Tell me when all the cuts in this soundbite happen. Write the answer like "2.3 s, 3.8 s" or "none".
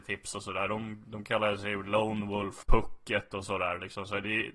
2.6 s